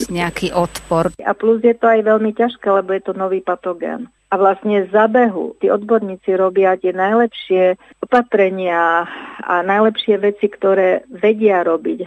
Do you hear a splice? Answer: no; 0 cuts

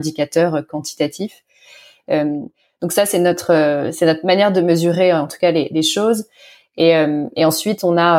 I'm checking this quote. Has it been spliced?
no; 0 cuts

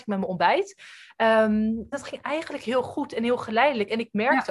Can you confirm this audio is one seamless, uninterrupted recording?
no; 1 cut; at 1.9 s

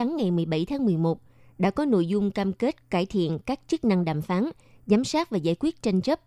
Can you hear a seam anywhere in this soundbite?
no; 0 cuts

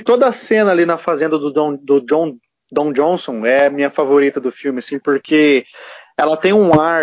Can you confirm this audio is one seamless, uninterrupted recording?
yes; 0 cuts

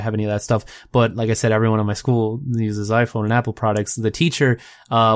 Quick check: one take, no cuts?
yes; 0 cuts

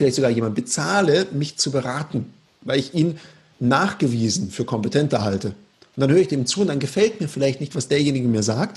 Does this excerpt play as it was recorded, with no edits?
yes; 0 cuts

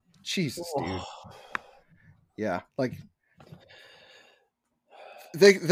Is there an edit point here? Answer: yes; 1 cut; at 2.7 s

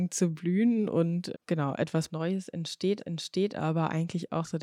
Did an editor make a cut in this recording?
yes; 3 cuts; at 1.3 s, 2.1 s, 3.0 s

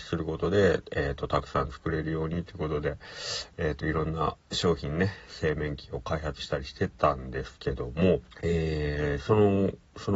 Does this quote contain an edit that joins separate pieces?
yes; 2 cuts; at 4.4 s, 8.3 s

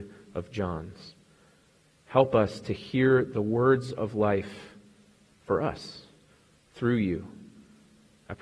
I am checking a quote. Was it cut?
no; 0 cuts

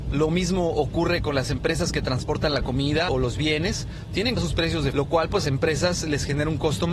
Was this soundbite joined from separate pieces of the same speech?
yes; 4 cuts; at 3.1 s, 4.4 s, 4.9 s, 5.4 s

